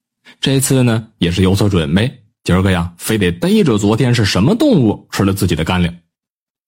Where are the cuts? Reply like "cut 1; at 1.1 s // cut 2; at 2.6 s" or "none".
cut 1; at 1.2 s